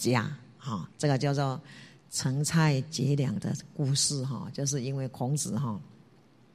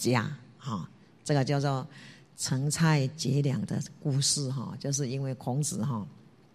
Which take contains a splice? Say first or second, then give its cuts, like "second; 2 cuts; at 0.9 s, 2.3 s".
first; 1 cut; at 0.9 s